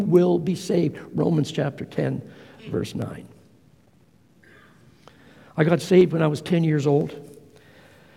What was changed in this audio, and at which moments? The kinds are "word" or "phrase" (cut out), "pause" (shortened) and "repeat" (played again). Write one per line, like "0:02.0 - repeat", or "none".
none